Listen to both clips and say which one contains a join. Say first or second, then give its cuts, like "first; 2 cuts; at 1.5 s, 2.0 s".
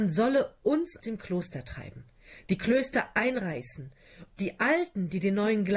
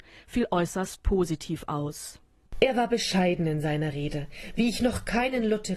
first; 2 cuts; at 1.0 s, 4.3 s